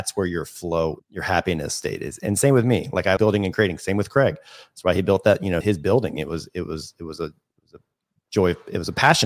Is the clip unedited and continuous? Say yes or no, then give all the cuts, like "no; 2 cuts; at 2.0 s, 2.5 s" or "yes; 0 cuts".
no; 3 cuts; at 1.0 s, 3.2 s, 5.6 s